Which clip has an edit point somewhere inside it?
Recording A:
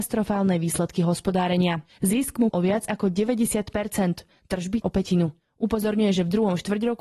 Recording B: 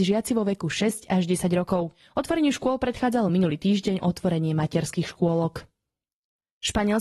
A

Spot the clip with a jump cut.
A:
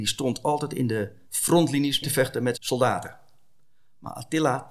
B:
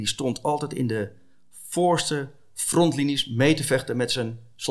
A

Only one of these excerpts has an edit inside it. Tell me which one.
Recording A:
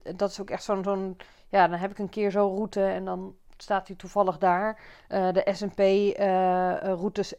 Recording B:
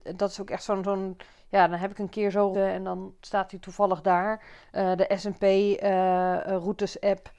B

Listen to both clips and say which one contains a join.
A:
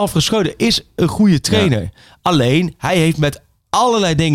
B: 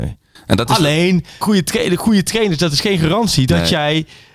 B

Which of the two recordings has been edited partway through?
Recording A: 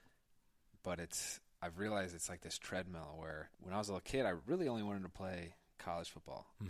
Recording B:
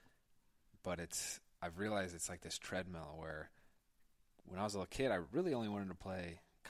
A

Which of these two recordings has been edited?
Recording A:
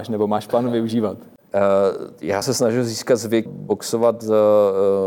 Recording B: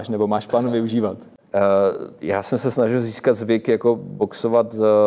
A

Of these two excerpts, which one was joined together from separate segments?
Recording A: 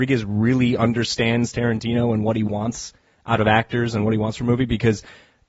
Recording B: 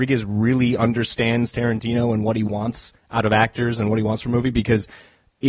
B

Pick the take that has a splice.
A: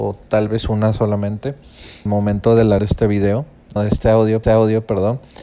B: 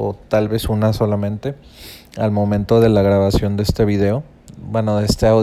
A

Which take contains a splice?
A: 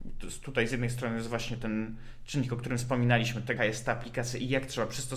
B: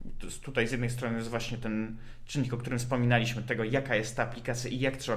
A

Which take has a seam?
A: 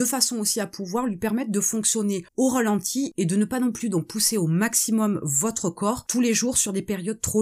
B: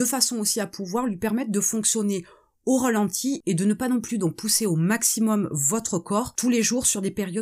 A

